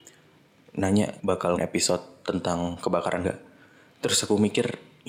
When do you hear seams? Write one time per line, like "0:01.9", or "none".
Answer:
0:01.2
0:01.6
0:03.2